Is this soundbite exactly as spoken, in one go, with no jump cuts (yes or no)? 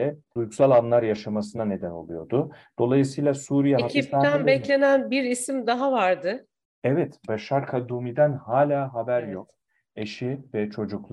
yes